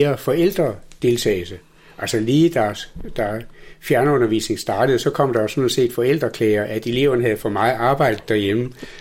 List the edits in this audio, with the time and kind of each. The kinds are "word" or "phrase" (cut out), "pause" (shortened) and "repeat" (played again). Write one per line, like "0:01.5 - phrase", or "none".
none